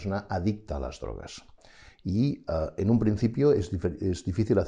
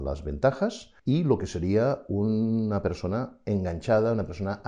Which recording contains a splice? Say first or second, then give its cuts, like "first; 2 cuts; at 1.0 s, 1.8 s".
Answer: second; 1 cut; at 1.0 s